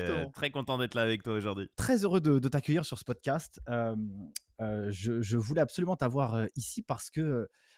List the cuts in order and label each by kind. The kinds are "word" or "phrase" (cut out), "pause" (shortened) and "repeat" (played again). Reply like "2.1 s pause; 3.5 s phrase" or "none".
1.7 s pause